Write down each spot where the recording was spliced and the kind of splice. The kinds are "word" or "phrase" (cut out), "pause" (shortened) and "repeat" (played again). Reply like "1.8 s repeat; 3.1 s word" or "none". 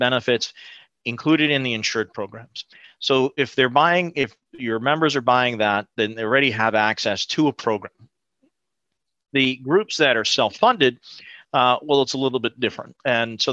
none